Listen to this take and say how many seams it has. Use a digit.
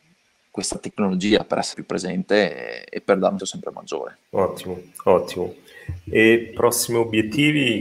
4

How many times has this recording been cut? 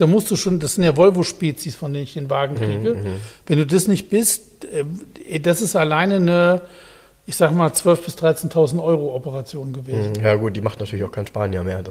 0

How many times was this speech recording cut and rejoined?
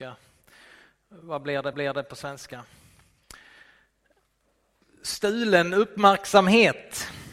1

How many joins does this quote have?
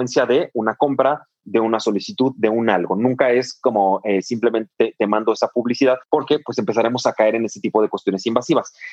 1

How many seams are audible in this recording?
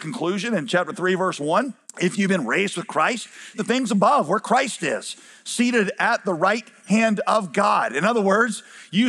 1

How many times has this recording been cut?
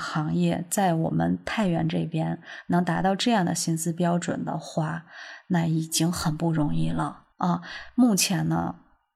1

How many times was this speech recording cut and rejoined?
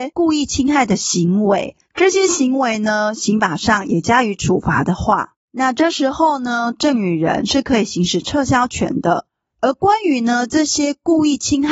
1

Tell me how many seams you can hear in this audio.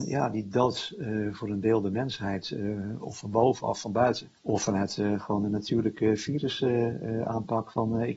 1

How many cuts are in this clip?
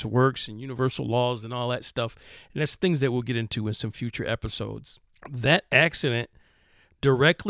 1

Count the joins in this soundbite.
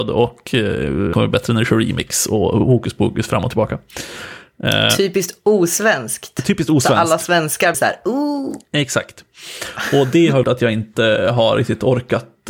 3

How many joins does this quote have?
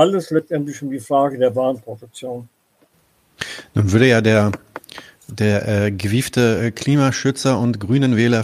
0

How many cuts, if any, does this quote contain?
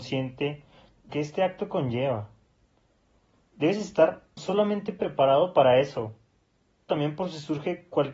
3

